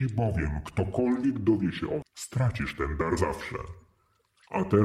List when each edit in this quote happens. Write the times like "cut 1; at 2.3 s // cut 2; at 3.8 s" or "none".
cut 1; at 2.0 s // cut 2; at 3.2 s